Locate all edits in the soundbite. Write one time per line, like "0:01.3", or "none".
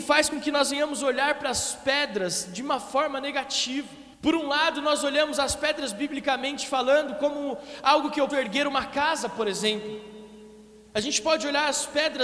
0:04.1
0:08.3